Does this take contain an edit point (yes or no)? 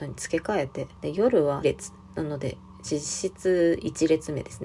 yes